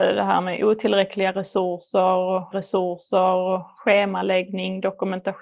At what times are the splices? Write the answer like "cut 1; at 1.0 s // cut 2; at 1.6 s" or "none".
cut 1; at 2.5 s